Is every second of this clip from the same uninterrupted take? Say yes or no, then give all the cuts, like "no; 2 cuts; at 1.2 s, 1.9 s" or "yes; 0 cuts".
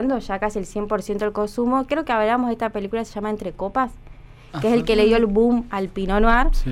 yes; 0 cuts